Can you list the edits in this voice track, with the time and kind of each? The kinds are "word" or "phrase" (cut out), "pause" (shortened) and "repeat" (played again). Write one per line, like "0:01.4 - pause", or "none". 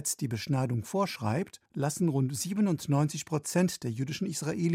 0:01.7 - pause